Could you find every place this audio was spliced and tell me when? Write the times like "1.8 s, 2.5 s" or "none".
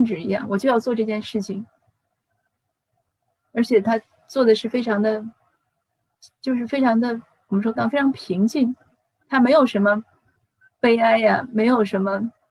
7.8 s